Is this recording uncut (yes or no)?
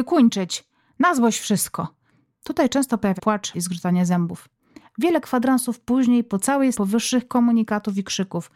no